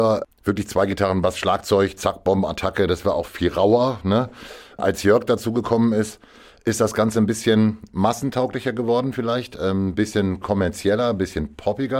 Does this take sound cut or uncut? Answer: uncut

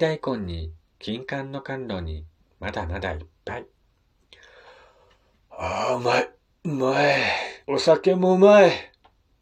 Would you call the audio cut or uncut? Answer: cut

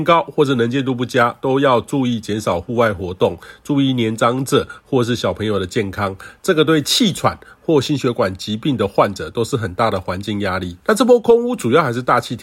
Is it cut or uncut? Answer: cut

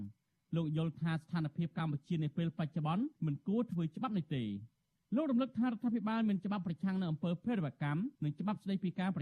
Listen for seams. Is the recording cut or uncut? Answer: cut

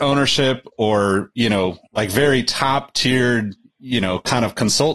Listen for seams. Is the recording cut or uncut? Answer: cut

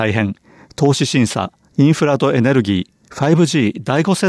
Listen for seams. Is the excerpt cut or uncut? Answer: cut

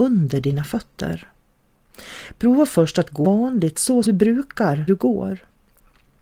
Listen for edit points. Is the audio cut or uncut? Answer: cut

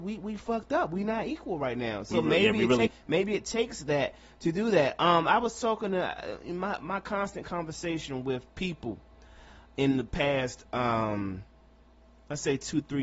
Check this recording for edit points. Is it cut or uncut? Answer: cut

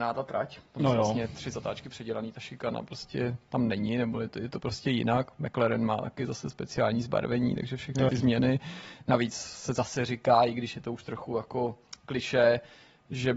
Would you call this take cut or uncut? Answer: cut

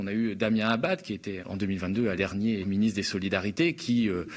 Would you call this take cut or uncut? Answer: cut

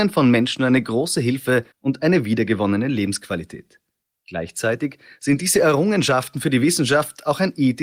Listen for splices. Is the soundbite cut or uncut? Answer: cut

